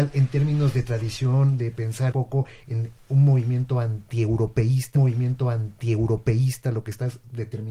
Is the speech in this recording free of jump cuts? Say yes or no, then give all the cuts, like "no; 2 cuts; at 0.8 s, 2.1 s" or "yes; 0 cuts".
no; 2 cuts; at 2.1 s, 4.9 s